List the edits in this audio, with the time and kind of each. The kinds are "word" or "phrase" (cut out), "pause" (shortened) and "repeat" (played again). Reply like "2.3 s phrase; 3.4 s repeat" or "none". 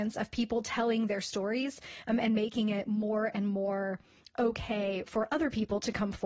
none